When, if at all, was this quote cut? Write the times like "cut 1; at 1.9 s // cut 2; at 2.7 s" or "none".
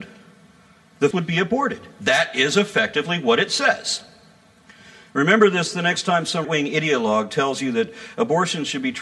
cut 1; at 1.1 s // cut 2; at 6.4 s